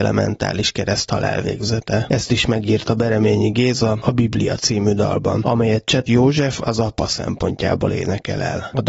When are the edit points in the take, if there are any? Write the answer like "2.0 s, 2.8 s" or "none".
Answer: 6.1 s

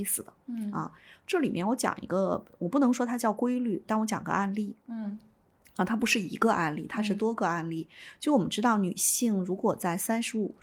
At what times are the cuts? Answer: none

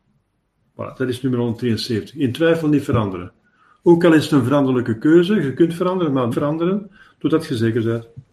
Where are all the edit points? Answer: 6.3 s

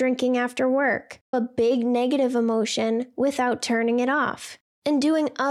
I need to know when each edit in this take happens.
1.3 s

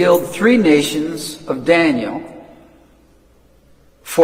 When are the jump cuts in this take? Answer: none

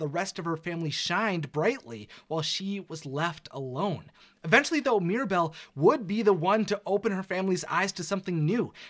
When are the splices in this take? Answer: none

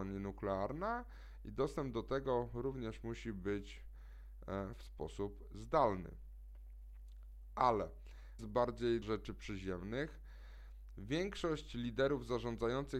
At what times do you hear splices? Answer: 8.4 s, 9.0 s

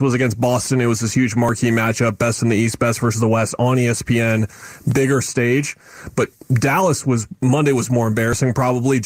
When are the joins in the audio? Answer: none

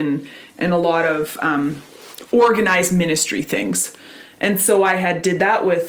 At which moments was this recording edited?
none

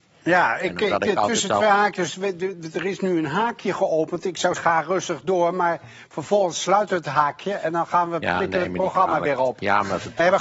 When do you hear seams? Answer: 4.5 s

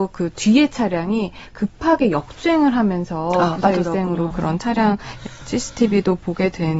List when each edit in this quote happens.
4.3 s

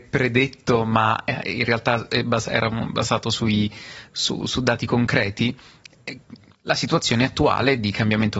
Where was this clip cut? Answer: none

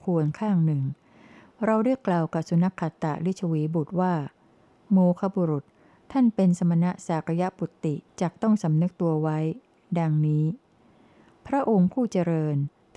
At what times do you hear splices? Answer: 8.1 s

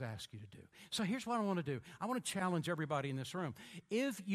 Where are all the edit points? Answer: none

